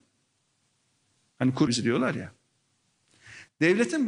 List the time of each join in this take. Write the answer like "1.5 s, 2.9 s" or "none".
1.7 s